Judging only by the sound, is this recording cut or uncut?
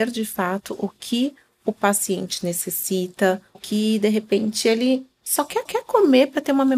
cut